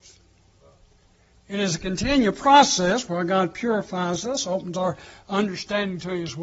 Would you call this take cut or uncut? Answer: uncut